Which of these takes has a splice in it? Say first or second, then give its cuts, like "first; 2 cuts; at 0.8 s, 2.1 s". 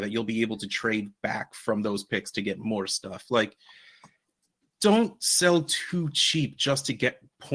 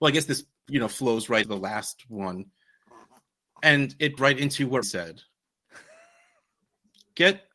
second; 3 cuts; at 1.4 s, 4.2 s, 4.8 s